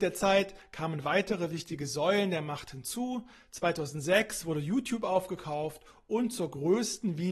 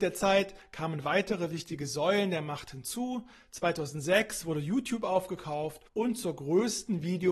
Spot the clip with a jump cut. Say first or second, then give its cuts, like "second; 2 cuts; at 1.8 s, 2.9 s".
second; 1 cut; at 5.9 s